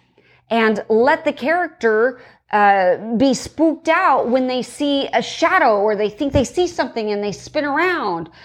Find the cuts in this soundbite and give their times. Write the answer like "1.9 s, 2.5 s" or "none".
none